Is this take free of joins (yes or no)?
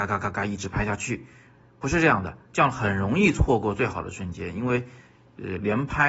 yes